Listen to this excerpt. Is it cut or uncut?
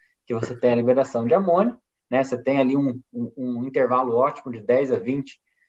uncut